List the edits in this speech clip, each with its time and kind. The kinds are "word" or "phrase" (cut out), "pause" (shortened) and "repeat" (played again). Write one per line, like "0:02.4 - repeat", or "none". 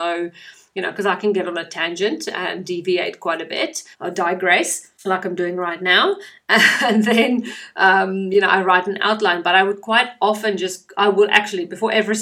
0:03.9 - pause
0:05.0 - pause